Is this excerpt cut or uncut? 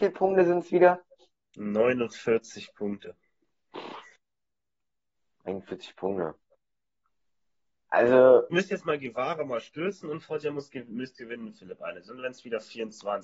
cut